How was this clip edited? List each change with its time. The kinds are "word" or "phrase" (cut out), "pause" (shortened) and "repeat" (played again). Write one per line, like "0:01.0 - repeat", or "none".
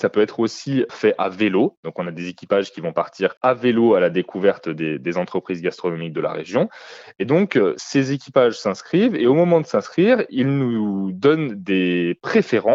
0:03.4 - pause